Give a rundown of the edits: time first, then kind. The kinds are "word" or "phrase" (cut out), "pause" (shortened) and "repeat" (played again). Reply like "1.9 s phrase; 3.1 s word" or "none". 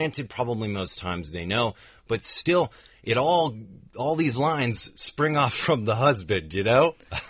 none